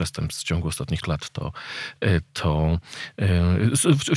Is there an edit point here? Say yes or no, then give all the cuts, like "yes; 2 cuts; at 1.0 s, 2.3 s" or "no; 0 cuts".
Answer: yes; 1 cut; at 1.0 s